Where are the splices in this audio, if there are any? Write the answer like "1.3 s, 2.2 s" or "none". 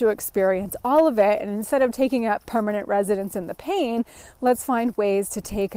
none